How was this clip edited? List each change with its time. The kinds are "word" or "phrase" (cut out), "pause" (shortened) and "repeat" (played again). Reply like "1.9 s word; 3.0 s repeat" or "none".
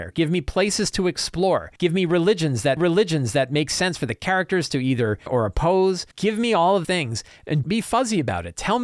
1.8 s pause; 2.8 s repeat; 5.3 s word; 6.1 s pause; 6.8 s word; 7.6 s word